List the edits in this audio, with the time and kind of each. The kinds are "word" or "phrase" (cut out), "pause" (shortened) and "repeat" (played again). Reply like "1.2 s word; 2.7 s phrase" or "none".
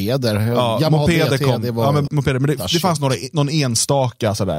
2.1 s word